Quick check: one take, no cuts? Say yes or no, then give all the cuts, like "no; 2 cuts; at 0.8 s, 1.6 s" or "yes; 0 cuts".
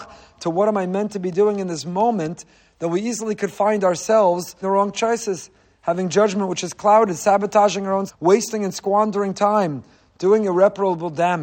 no; 2 cuts; at 4.6 s, 8.1 s